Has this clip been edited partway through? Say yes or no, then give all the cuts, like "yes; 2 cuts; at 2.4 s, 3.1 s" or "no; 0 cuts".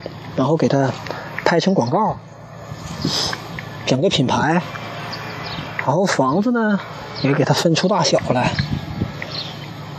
no; 0 cuts